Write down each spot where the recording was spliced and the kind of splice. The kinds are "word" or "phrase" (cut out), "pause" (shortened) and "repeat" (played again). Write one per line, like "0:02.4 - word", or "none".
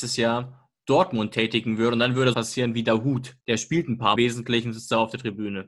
0:02.3 - word
0:03.4 - pause
0:04.2 - phrase